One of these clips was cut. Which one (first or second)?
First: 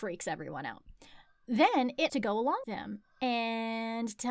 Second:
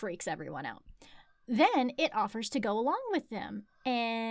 first